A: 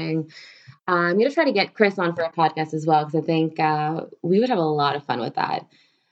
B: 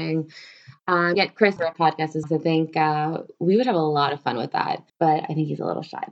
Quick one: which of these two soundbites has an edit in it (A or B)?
B